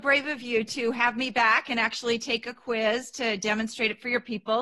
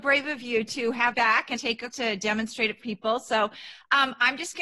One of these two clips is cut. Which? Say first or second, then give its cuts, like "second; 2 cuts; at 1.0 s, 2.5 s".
second; 4 cuts; at 1.1 s, 1.6 s, 1.9 s, 2.8 s